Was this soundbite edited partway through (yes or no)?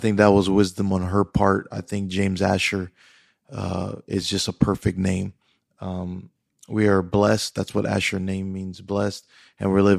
no